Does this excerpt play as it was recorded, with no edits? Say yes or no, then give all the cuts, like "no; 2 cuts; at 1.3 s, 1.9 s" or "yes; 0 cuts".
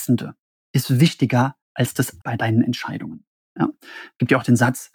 no; 2 cuts; at 1.6 s, 2.2 s